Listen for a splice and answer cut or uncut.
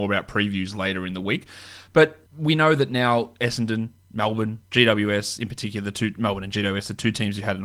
cut